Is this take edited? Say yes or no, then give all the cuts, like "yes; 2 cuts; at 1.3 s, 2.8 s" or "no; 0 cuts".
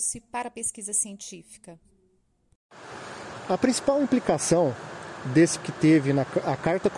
yes; 1 cut; at 5.6 s